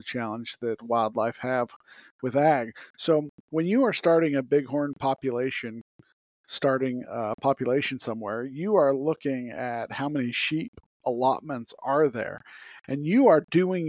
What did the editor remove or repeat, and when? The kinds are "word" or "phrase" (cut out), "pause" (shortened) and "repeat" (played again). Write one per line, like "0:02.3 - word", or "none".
none